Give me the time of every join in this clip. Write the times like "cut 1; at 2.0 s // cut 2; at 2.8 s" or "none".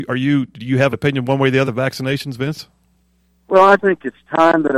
cut 1; at 0.9 s // cut 2; at 1.6 s // cut 3; at 3.8 s

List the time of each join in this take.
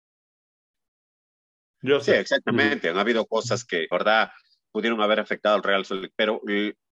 cut 1; at 3.9 s

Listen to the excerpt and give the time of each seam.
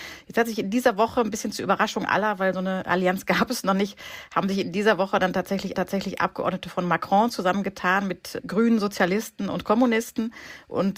cut 1; at 5.7 s

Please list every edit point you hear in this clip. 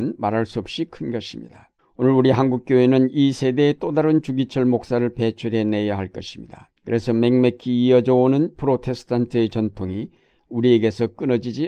cut 1; at 1.8 s // cut 2; at 6.8 s

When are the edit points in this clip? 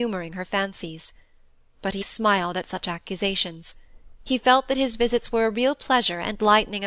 cut 1; at 2.0 s

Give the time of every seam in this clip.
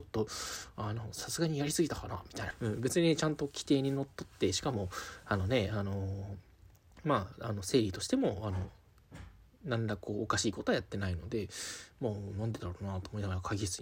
cut 1; at 2.5 s

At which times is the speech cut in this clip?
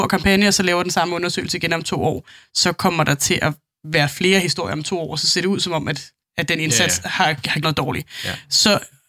cut 1; at 6.2 s // cut 2; at 7.6 s

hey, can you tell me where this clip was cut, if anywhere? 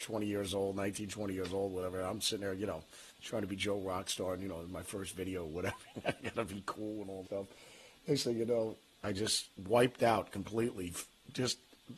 cut 1; at 3.1 s // cut 2; at 7.2 s // cut 3; at 9.0 s // cut 4; at 9.6 s

